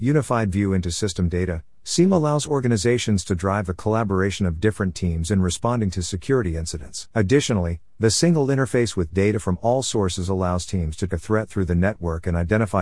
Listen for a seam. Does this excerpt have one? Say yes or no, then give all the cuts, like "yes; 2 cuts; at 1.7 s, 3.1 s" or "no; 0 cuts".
yes; 2 cuts; at 7.1 s, 11.1 s